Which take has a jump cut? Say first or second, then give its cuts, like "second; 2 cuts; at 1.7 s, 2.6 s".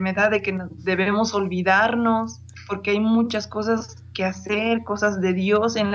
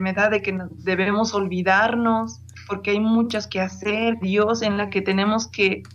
second; 2 cuts; at 3.5 s, 4.2 s